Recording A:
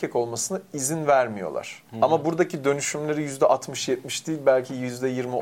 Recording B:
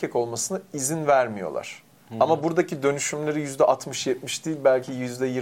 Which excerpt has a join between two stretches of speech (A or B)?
A